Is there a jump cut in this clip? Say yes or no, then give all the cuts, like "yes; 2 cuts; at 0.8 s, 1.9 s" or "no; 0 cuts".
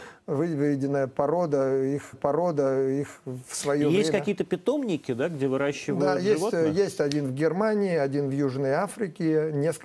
yes; 1 cut; at 2.1 s